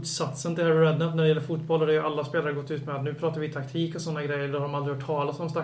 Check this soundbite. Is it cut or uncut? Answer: uncut